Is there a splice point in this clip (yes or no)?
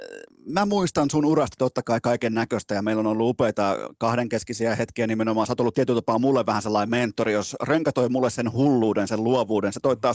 no